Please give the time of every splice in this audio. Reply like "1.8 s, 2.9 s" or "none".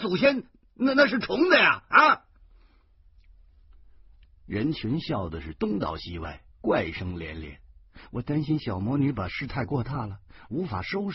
6.5 s